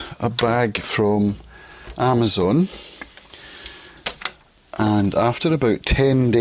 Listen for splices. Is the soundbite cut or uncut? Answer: uncut